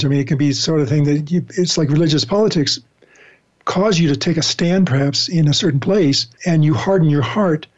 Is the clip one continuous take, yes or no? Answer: no